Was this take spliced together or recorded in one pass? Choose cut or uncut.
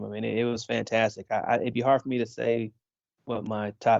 uncut